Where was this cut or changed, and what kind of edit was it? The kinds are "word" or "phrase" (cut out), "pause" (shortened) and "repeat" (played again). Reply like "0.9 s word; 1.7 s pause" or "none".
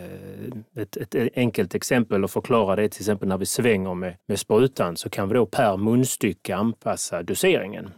4.2 s pause

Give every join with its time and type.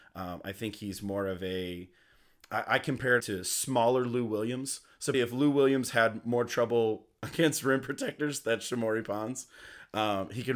3.2 s word; 5.1 s word

